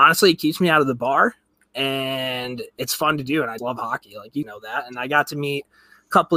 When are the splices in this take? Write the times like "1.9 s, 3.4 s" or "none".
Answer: 3.6 s, 4.4 s